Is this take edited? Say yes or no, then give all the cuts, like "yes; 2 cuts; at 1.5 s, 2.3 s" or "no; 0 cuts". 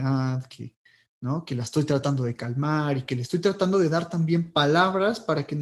no; 0 cuts